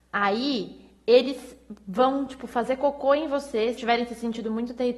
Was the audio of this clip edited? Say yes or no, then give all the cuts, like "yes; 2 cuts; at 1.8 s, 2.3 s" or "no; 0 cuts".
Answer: yes; 1 cut; at 3.8 s